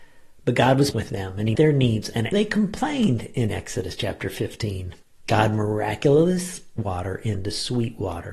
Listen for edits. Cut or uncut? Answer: cut